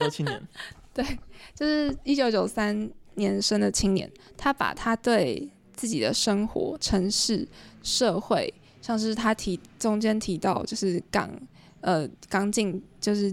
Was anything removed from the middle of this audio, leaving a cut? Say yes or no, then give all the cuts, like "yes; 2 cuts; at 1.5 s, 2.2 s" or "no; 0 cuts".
no; 0 cuts